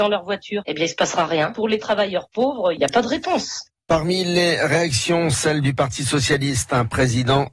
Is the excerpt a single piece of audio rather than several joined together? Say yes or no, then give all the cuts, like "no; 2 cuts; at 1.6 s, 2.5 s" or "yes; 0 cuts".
yes; 0 cuts